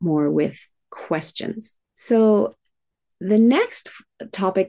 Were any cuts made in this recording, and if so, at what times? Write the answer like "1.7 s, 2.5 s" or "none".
1.8 s